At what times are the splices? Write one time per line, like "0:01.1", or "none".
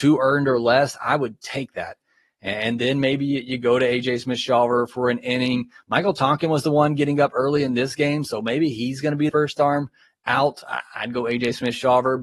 0:09.3